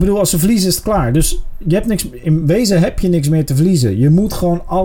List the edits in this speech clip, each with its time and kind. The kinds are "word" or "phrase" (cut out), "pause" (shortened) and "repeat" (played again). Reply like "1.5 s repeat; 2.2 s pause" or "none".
none